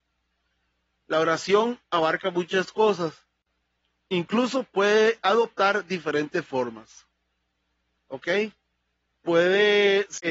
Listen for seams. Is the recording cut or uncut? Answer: uncut